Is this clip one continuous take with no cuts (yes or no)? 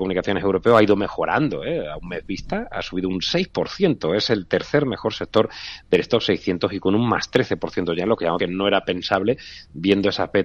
no